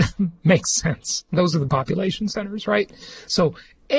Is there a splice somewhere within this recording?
yes; 1 cut; at 1.7 s

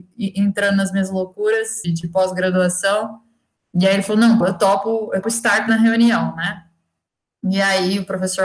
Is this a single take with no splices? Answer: no; 4 cuts; at 1.8 s, 4.4 s, 5.2 s, 5.7 s

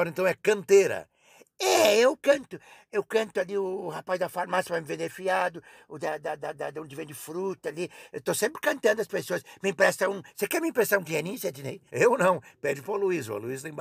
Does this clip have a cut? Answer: yes; 1 cut; at 11.9 s

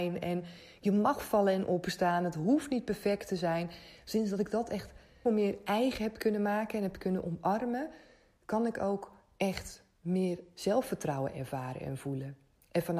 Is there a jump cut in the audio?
yes; 1 cut; at 5.3 s

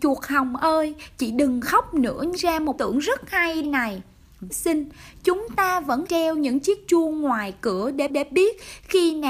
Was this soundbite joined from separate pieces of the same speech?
yes; 6 cuts; at 2.4 s, 2.8 s, 3.6 s, 4.5 s, 6.1 s, 8.1 s

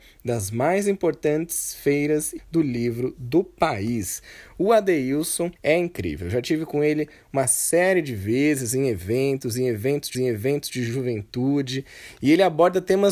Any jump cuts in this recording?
yes; 3 cuts; at 2.4 s, 5.6 s, 10.1 s

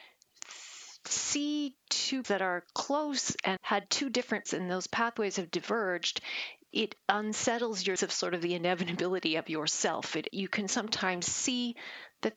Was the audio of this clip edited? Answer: yes; 6 cuts; at 2.2 s, 3.6 s, 4.5 s, 6.7 s, 8.0 s, 10.3 s

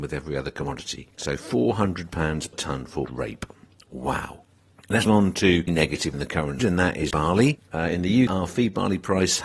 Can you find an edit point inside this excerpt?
yes; 8 cuts; at 2.5 s, 3.1 s, 5.1 s, 5.7 s, 6.1 s, 6.6 s, 7.1 s, 8.3 s

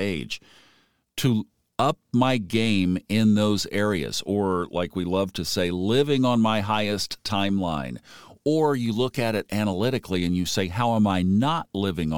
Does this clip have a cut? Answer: no; 0 cuts

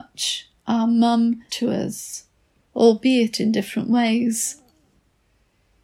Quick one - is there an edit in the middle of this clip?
yes; 1 cut; at 1.5 s

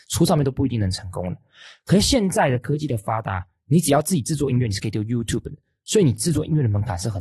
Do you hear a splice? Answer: no; 0 cuts

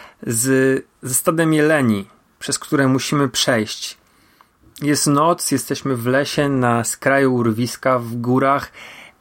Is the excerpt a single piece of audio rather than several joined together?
yes; 0 cuts

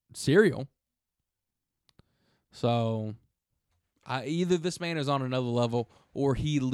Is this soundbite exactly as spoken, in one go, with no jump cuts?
yes; 0 cuts

